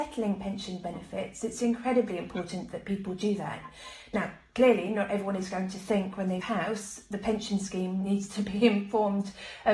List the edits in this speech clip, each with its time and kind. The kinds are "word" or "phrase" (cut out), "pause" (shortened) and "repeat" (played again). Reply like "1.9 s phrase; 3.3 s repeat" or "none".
6.4 s word

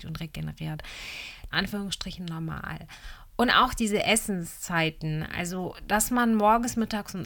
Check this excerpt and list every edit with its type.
1.5 s phrase

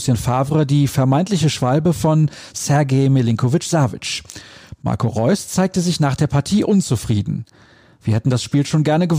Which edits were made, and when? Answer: none

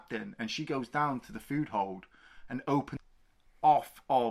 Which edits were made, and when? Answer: none

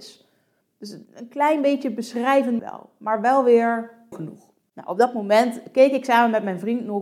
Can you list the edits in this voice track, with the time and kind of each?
1.1 s pause; 2.6 s phrase; 4.1 s word

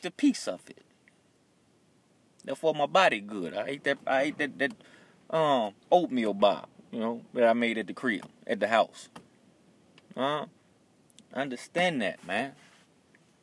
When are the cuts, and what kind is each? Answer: 5.8 s pause; 10.8 s pause

